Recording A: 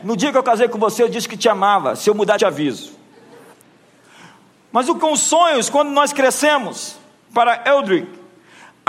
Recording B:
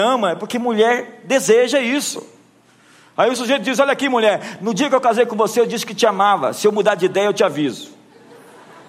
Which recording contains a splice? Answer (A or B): A